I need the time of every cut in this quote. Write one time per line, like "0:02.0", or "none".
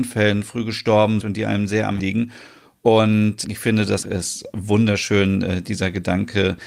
0:01.2
0:02.0
0:03.4
0:04.0